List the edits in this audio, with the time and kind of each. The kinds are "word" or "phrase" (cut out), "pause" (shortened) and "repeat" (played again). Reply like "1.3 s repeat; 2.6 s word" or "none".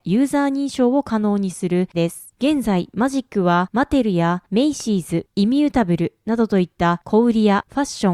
1.9 s word